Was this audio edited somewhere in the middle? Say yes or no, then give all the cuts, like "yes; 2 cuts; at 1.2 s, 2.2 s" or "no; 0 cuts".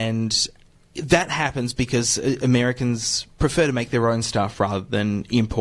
no; 0 cuts